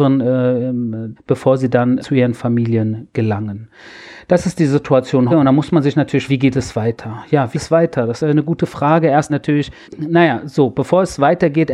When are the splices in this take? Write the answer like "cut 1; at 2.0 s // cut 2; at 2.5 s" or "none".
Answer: cut 1; at 1.2 s // cut 2; at 2.0 s // cut 3; at 5.3 s // cut 4; at 6.3 s // cut 5; at 7.5 s // cut 6; at 8.2 s // cut 7; at 9.3 s // cut 8; at 9.8 s